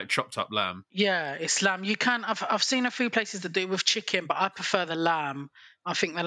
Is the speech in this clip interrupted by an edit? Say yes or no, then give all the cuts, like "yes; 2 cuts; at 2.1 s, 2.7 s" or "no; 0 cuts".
no; 0 cuts